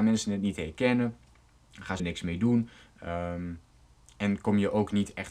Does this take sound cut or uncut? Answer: cut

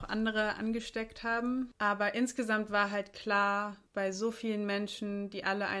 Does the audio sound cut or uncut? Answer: cut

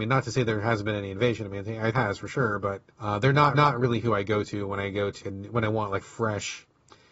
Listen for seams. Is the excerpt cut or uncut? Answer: cut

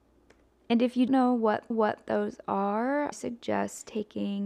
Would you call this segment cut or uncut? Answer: cut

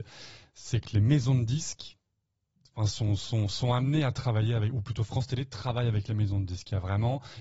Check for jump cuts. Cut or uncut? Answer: uncut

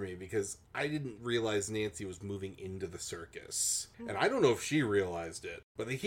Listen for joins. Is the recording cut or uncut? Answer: uncut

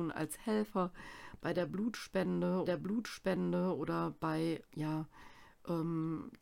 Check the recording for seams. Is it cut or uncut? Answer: cut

